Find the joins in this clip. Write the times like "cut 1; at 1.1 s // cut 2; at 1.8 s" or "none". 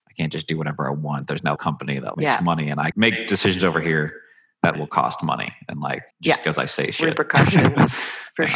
cut 1; at 1.6 s // cut 2; at 2.1 s // cut 3; at 2.9 s // cut 4; at 4.8 s // cut 5; at 6.1 s